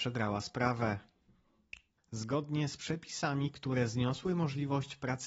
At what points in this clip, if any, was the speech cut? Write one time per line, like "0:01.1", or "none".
0:02.0